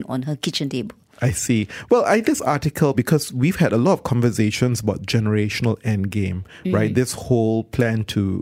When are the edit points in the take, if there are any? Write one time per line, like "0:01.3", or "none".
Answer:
0:02.2
0:02.9

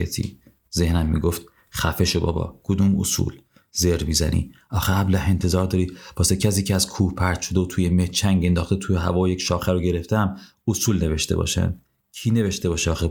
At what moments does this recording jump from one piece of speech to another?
none

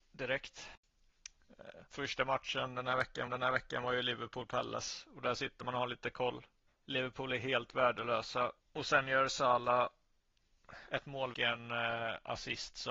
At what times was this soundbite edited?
0:01.9
0:03.3
0:06.7
0:08.6
0:11.3

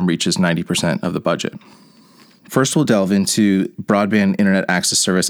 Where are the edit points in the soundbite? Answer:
none

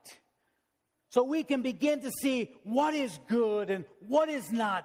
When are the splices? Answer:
none

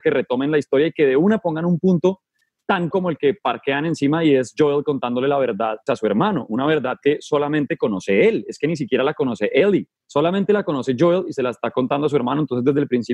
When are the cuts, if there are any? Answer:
0:02.9
0:05.9
0:10.0

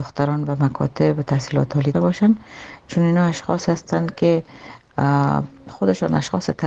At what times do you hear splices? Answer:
0:01.9

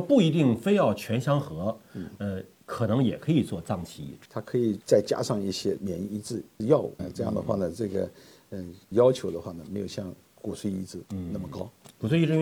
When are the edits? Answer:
0:04.3
0:07.0
0:08.9
0:11.1

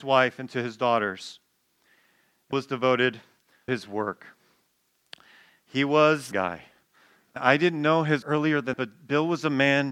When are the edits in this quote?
0:02.5
0:03.7
0:06.3
0:07.4
0:08.2
0:08.7

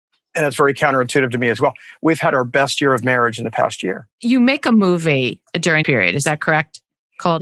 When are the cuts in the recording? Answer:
0:04.1
0:05.8

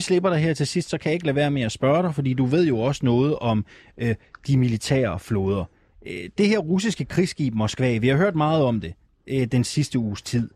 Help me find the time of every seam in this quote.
none

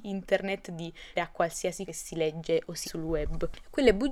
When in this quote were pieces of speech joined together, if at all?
0:01.2
0:01.9
0:02.8

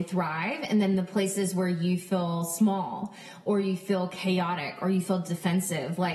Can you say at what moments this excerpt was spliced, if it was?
none

